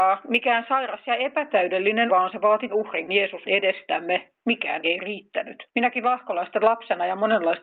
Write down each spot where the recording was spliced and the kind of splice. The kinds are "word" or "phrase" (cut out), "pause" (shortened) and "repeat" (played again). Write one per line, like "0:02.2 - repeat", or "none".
0:02.1 - word
0:02.7 - word
0:03.1 - word
0:03.5 - word
0:04.8 - word
0:05.7 - pause

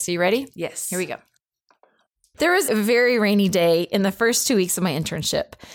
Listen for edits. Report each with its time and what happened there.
0:02.7 - word

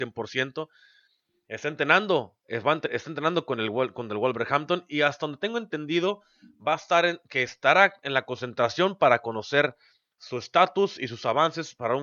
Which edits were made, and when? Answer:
none

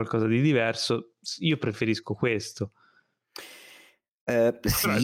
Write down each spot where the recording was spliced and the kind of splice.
none

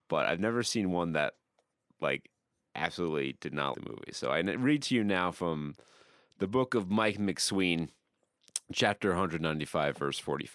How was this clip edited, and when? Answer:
0:03.7 - word

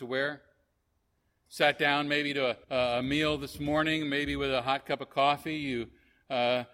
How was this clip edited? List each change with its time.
0:02.6 - pause

